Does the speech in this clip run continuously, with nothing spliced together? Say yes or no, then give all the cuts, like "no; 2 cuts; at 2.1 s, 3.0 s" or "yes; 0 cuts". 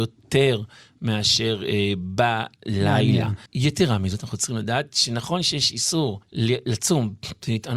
no; 2 cuts; at 3.5 s, 6.2 s